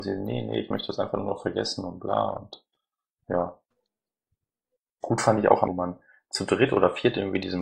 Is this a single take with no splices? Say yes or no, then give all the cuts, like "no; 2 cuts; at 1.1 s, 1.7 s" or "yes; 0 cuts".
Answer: no; 1 cut; at 5.7 s